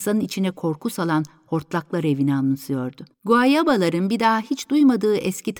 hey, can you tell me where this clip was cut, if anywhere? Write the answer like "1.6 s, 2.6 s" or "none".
3.1 s

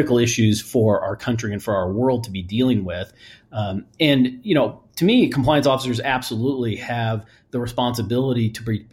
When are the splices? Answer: none

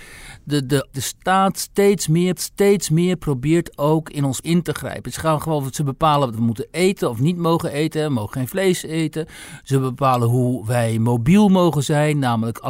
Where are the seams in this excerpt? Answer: 0.9 s, 2.3 s, 4.4 s, 6.3 s

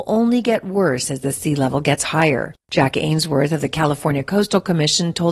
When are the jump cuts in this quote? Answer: 2.6 s

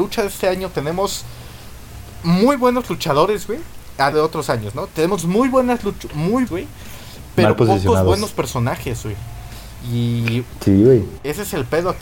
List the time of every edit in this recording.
4.1 s, 6.5 s

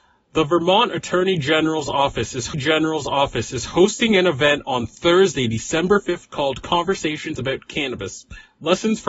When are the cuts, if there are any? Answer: 2.5 s

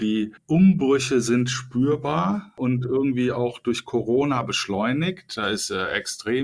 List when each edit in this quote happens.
none

